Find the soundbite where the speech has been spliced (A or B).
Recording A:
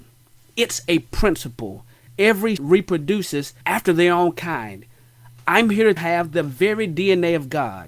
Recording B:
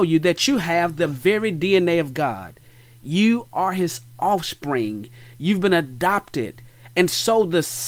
A